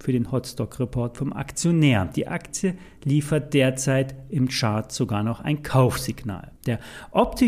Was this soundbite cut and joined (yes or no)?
yes